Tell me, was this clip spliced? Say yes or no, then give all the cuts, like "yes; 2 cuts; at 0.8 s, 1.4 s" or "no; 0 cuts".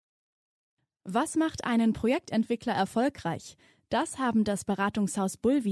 no; 0 cuts